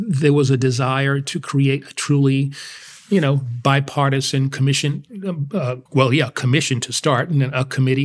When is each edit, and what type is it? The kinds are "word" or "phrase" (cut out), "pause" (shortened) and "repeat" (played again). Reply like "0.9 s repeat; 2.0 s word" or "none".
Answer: 5.9 s pause